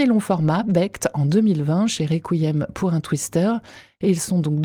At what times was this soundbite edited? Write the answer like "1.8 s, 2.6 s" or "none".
none

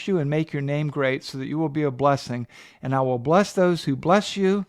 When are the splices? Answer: none

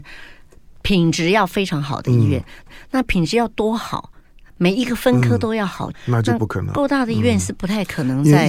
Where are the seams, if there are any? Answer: 2.7 s, 5.9 s

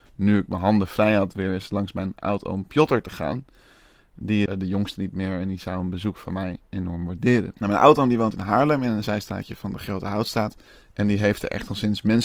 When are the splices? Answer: 4.5 s, 7.6 s, 10.7 s

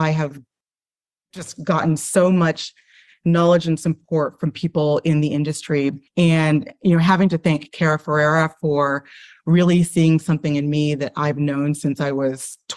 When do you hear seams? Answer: 6.1 s

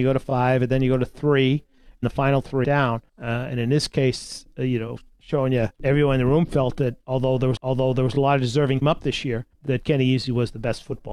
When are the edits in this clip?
2.0 s, 2.6 s, 3.1 s, 5.7 s, 7.6 s, 8.8 s, 9.5 s

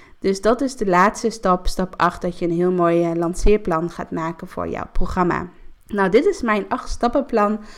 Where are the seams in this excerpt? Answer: 5.8 s

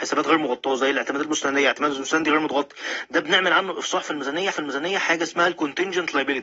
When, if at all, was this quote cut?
4.5 s

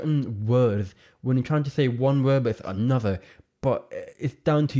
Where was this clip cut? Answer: none

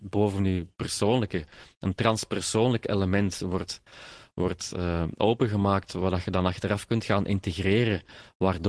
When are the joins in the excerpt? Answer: none

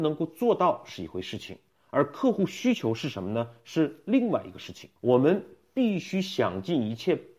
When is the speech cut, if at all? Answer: 5.0 s

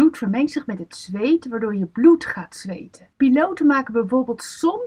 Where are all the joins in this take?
3.1 s

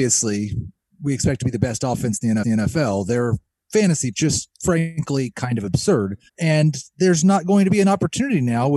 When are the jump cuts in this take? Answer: 2.4 s, 4.1 s, 6.3 s

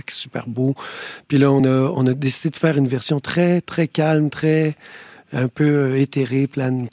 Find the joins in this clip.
none

